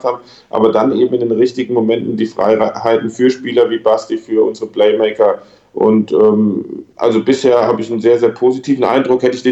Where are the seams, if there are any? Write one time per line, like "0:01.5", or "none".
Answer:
none